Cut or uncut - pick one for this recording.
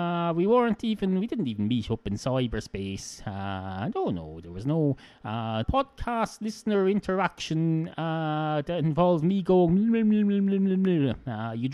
cut